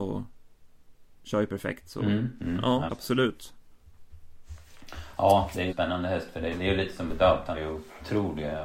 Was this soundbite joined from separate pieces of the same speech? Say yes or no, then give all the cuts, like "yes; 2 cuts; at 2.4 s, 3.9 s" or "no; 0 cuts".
yes; 5 cuts; at 2.9 s, 5.7 s, 6.5 s, 7.1 s, 7.5 s